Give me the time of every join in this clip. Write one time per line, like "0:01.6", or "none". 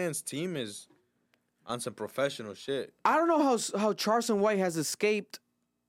none